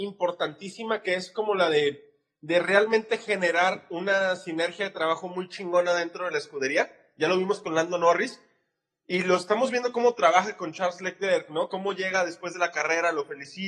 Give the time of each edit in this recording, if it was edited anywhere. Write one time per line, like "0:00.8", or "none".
none